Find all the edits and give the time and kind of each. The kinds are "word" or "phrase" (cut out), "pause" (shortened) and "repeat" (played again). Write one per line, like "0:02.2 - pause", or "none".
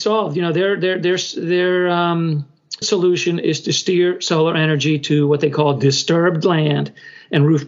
0:02.8 - word